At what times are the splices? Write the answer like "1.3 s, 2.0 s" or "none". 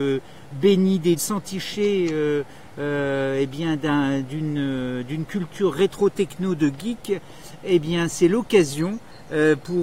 1.2 s